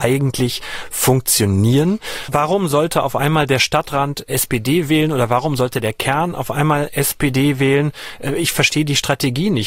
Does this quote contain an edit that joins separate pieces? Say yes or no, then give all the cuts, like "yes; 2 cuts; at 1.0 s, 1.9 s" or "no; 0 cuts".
no; 0 cuts